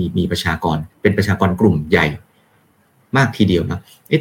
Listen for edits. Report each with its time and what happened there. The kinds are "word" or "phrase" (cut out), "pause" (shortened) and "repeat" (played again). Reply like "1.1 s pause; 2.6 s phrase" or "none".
0.9 s pause